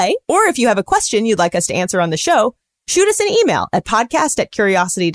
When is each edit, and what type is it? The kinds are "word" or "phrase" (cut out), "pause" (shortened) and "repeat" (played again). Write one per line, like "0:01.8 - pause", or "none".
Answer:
none